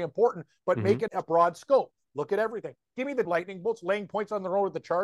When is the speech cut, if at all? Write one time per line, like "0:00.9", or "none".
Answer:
0:01.1
0:03.2